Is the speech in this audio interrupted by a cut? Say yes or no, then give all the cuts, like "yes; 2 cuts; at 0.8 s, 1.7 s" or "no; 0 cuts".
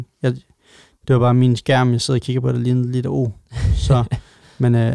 no; 0 cuts